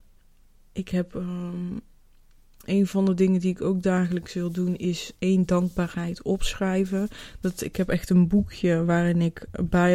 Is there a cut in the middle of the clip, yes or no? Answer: no